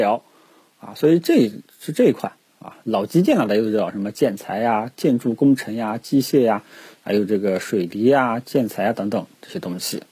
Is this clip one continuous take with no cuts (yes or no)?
yes